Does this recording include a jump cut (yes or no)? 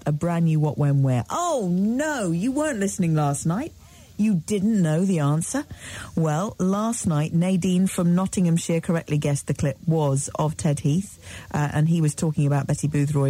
no